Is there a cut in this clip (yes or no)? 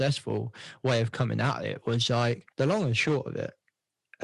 yes